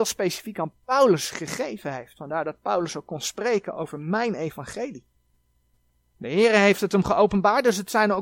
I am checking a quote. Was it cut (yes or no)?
no